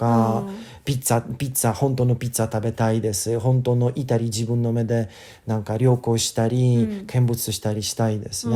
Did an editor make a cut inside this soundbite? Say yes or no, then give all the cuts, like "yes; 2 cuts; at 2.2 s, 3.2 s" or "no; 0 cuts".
no; 0 cuts